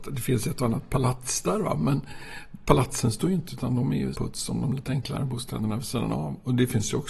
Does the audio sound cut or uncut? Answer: cut